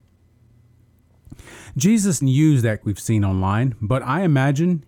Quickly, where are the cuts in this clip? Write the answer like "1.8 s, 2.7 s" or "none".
2.2 s, 2.8 s